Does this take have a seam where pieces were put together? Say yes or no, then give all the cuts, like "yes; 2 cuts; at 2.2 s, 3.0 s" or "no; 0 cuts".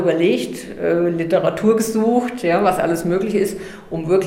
no; 0 cuts